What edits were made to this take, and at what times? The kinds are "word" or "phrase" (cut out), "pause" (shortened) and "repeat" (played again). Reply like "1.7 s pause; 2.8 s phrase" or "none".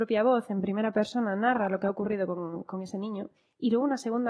3.4 s pause